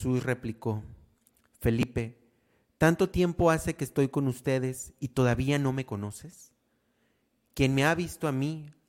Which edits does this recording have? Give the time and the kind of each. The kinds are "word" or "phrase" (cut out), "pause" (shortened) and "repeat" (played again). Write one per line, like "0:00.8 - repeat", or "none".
none